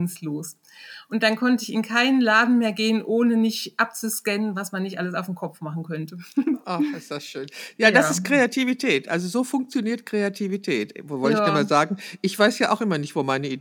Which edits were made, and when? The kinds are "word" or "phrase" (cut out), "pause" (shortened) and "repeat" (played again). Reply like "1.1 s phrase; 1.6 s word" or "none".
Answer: none